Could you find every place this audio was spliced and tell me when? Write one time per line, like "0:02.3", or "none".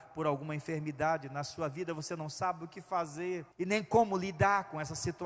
0:03.5